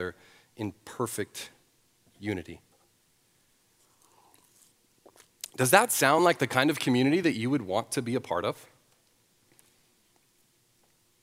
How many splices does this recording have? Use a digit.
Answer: 0